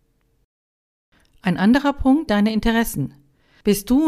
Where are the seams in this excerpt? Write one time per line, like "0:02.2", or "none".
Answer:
0:02.3